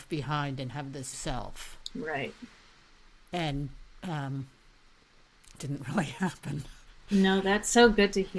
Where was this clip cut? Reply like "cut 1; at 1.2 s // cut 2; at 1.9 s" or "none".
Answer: cut 1; at 1.1 s // cut 2; at 5.6 s